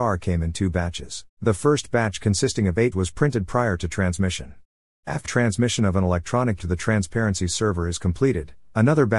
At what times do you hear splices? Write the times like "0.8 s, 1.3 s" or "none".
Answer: 1.3 s, 2.9 s, 5.2 s, 6.6 s